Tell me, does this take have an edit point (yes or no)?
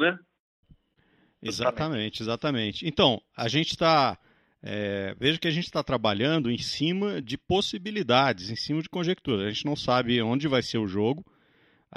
no